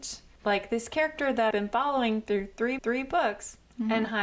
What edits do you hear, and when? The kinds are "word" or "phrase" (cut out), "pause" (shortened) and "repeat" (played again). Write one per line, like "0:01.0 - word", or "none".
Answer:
0:01.5 - word
0:02.8 - repeat